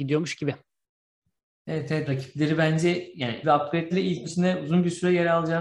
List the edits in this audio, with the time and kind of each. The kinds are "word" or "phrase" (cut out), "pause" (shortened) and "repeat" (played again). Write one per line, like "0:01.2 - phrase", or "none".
0:02.1 - word
0:03.4 - word
0:03.9 - word
0:04.2 - word

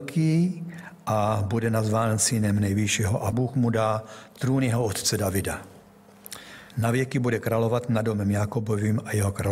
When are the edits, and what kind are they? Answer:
0:03.3 - word
0:06.7 - pause

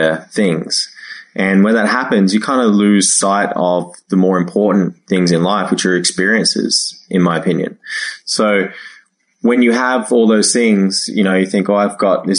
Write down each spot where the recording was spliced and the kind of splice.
none

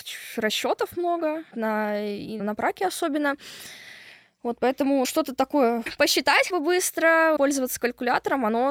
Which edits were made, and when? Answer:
0:01.5 - word
0:02.4 - word
0:05.0 - word
0:05.9 - word
0:06.5 - word
0:07.4 - word

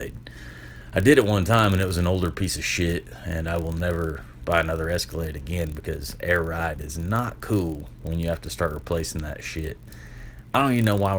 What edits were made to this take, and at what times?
none

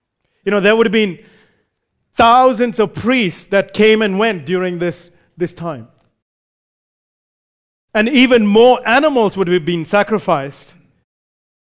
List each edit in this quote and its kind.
none

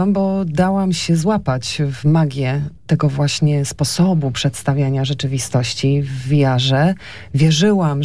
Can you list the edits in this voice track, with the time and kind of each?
none

